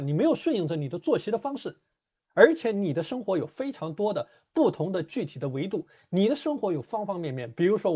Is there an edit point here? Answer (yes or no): no